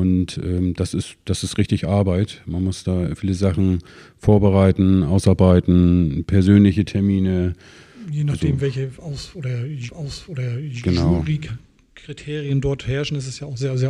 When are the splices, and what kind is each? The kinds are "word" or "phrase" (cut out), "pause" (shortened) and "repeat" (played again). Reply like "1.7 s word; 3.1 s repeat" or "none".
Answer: 3.2 s word; 9.9 s repeat